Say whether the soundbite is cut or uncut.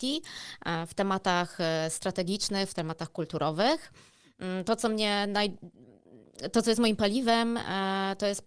uncut